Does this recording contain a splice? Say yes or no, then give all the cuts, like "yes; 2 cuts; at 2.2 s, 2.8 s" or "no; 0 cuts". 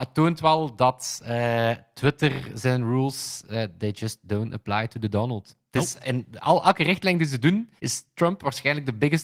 yes; 1 cut; at 7.8 s